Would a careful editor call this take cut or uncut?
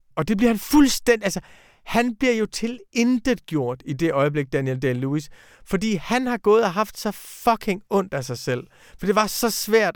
uncut